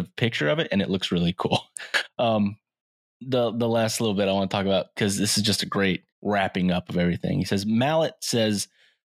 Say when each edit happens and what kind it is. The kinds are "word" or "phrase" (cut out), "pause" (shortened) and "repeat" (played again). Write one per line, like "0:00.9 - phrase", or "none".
0:02.8 - pause
0:06.1 - pause